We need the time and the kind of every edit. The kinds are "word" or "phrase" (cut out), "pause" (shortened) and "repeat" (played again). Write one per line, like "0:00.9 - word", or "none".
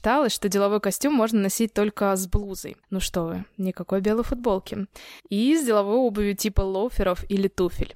0:02.8 - pause
0:05.2 - pause

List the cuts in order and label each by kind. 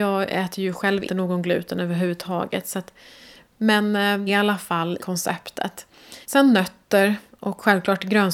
0:01.1 - word
0:04.3 - phrase
0:05.0 - word
0:06.2 - pause

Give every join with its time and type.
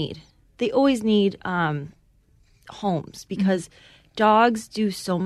none

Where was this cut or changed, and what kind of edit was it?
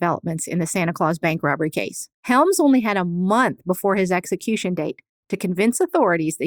0:02.2 - pause

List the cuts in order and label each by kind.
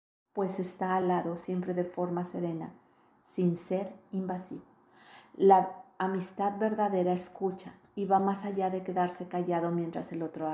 none

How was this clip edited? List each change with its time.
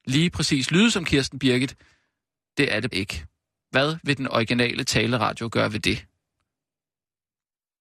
0:02.9 - word

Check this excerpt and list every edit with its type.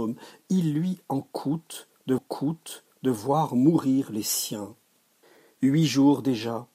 0:02.2 - repeat
0:05.2 - pause

